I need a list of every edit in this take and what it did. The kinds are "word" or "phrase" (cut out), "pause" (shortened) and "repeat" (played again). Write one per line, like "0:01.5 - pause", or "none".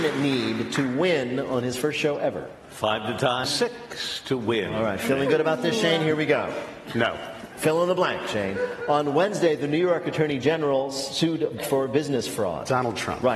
0:03.4 - word
0:11.6 - word